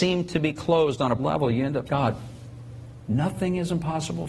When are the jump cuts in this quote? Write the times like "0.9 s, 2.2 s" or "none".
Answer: 1.2 s, 1.8 s

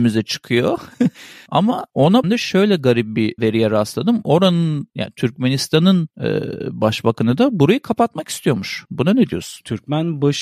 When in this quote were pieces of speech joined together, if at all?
2.2 s, 3.4 s

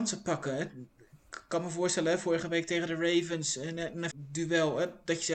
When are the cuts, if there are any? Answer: 4.1 s

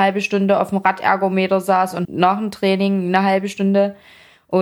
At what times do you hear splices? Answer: 2.0 s

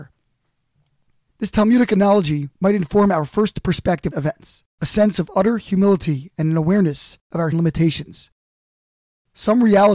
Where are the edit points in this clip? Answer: 2.5 s, 4.1 s, 4.7 s, 7.2 s, 7.5 s

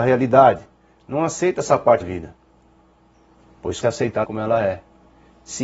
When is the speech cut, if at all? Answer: 2.0 s, 3.8 s, 4.2 s

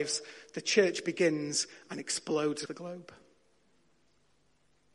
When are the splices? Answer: 2.7 s

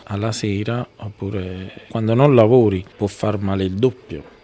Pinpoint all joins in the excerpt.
1.9 s

